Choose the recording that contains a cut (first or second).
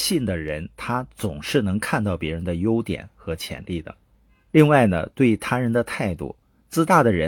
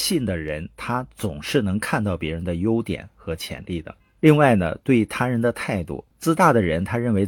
second